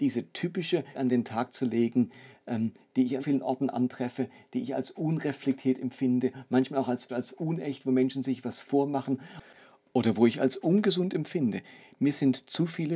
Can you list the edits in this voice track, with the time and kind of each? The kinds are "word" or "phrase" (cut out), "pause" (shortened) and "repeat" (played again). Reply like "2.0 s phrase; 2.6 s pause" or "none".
0.9 s word; 3.2 s word; 7.1 s word